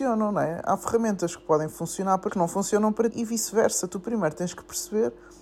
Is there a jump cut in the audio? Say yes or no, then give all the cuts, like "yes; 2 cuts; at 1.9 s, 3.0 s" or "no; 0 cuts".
yes; 2 cuts; at 2.3 s, 3.1 s